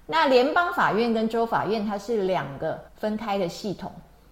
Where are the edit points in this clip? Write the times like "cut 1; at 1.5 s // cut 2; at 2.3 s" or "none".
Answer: cut 1; at 2.9 s